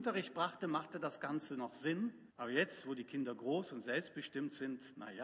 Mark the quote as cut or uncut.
cut